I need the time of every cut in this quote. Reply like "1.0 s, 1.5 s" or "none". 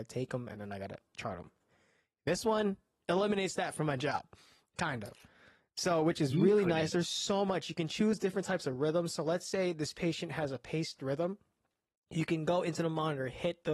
none